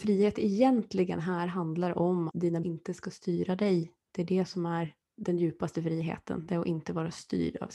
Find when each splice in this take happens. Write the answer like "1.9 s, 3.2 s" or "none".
2.3 s, 2.6 s, 5.0 s